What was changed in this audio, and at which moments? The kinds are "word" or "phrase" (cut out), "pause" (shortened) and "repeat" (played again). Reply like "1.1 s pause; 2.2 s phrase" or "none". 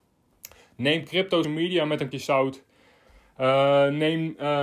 1.4 s word; 2.1 s word